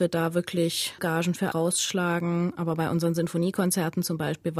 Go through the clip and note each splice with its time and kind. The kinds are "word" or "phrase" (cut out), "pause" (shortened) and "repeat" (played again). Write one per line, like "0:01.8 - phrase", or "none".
0:01.0 - word
0:01.5 - word